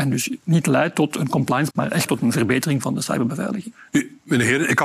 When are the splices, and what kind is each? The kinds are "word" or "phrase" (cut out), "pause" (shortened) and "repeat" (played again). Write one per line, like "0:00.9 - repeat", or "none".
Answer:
0:01.7 - word
0:02.1 - word

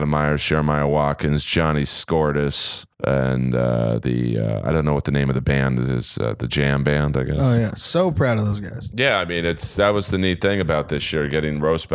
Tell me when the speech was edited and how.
0:02.9 - pause

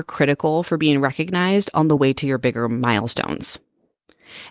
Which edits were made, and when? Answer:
none

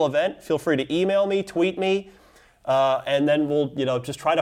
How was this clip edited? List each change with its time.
none

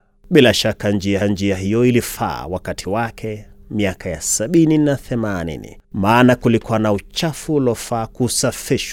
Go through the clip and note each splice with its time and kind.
0:01.2 - repeat
0:05.8 - pause

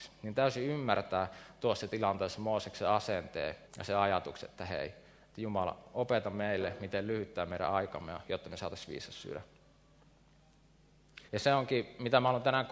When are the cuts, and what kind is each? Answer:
0:03.6 - pause
0:11.3 - pause

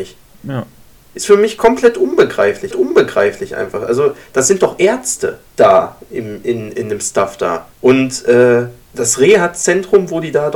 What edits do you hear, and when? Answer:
0:02.7 - repeat
0:05.5 - pause
0:06.4 - word
0:07.7 - pause
0:08.8 - pause

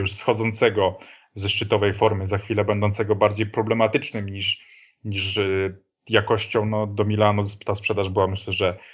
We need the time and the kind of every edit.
none

